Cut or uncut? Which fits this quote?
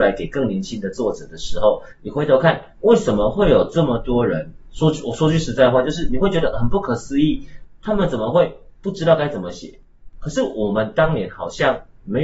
cut